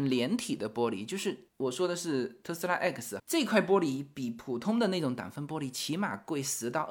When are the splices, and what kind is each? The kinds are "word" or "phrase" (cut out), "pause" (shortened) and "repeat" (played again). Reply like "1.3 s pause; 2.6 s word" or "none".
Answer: 3.2 s word